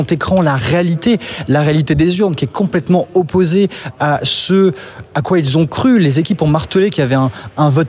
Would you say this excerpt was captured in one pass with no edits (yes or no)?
yes